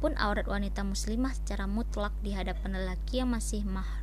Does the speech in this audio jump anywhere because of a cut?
no; 0 cuts

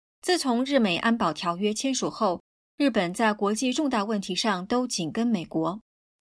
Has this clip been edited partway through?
no; 0 cuts

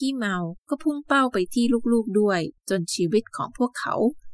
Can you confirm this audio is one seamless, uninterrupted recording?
no; 1 cut; at 2.6 s

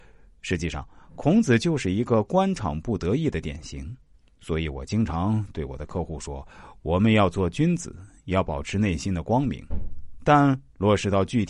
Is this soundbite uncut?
yes; 0 cuts

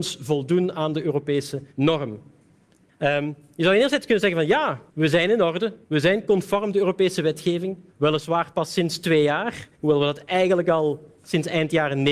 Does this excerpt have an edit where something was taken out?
yes; 6 cuts; at 1.7 s, 4.9 s, 5.8 s, 7.9 s, 9.7 s, 11.2 s

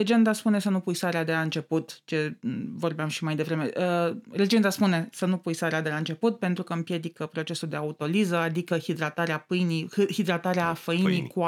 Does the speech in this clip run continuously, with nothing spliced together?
yes; 0 cuts

